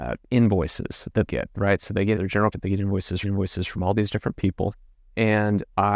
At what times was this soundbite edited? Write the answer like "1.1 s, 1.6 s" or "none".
1.3 s, 2.2 s, 2.5 s, 3.2 s, 4.9 s